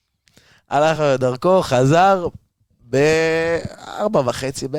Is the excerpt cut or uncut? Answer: uncut